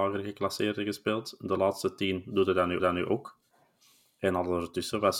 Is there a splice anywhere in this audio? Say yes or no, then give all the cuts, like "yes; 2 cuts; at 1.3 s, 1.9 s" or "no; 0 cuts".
yes; 1 cut; at 2.8 s